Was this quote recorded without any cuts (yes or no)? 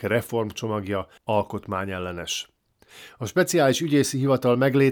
no